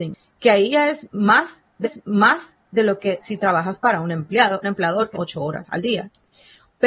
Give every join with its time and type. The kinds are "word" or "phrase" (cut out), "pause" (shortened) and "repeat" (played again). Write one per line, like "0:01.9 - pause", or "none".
0:01.8 - repeat
0:03.2 - word
0:04.6 - word
0:05.1 - word